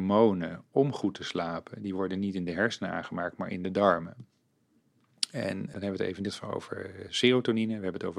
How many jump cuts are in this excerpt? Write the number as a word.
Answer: two